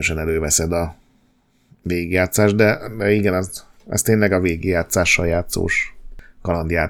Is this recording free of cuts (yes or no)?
yes